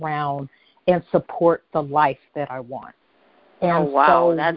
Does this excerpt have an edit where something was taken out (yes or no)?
no